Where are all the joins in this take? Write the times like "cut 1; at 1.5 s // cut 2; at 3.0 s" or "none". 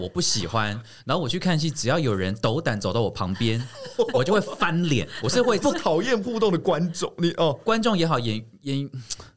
cut 1; at 5.6 s